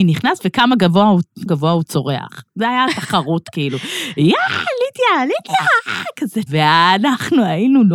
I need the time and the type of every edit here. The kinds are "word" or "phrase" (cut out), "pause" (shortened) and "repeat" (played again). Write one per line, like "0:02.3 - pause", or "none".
0:01.5 - word
0:06.5 - phrase